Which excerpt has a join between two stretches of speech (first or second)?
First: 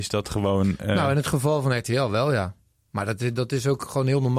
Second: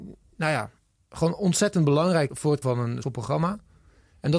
second